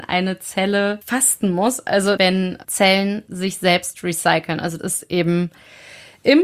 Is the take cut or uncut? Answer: cut